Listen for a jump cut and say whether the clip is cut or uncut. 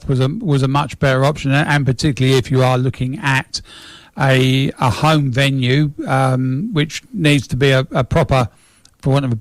uncut